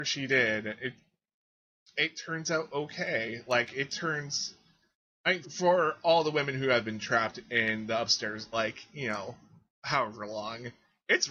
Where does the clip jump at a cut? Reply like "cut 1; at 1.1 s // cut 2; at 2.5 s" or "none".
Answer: cut 1; at 5.4 s // cut 2; at 8.5 s